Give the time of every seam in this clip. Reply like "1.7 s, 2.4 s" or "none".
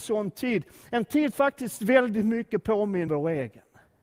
1.3 s, 3.1 s